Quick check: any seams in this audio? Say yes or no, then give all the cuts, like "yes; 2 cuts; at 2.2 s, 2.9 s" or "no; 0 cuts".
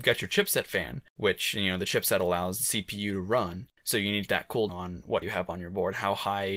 yes; 3 cuts; at 4.3 s, 4.7 s, 5.2 s